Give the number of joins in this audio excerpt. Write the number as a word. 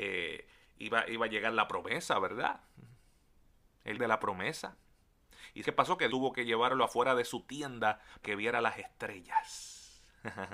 five